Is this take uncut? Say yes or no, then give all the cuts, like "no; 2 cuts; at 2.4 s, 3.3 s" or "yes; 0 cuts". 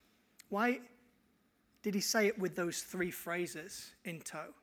yes; 0 cuts